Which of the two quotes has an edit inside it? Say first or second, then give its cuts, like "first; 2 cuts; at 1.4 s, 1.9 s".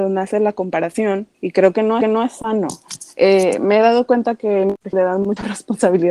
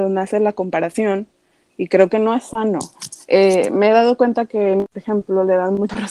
first; 3 cuts; at 1.3 s, 2.0 s, 4.9 s